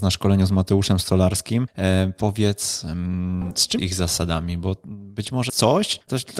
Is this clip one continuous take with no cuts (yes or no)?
no